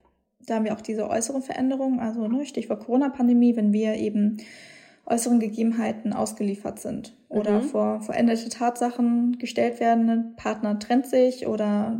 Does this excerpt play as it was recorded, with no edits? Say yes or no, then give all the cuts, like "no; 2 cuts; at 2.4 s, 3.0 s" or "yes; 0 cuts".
yes; 0 cuts